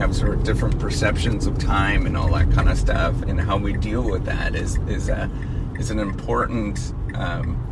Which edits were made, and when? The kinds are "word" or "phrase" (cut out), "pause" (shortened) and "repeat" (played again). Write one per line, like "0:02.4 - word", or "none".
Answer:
0:03.2 - word